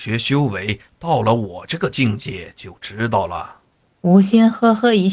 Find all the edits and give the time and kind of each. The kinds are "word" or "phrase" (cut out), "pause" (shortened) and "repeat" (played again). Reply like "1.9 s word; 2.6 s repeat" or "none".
3.7 s pause